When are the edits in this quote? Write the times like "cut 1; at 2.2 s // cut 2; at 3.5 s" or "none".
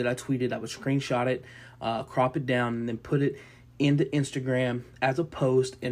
none